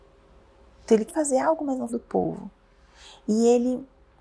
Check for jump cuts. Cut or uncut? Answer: cut